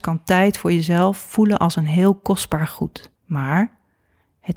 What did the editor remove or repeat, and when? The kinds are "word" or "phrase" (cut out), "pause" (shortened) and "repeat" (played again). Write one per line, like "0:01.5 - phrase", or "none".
0:03.2 - pause